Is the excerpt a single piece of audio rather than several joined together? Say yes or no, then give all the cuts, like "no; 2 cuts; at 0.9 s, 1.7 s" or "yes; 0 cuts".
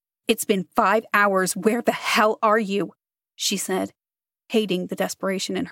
yes; 0 cuts